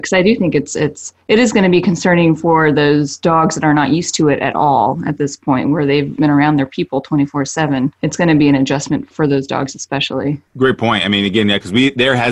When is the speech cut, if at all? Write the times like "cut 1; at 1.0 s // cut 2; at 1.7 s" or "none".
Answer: cut 1; at 1.2 s // cut 2; at 6.2 s // cut 3; at 8.0 s // cut 4; at 9.1 s // cut 5; at 10.5 s